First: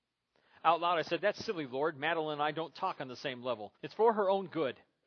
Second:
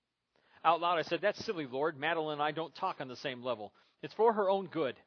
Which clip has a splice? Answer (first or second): first